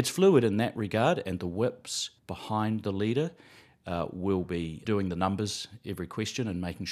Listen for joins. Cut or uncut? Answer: cut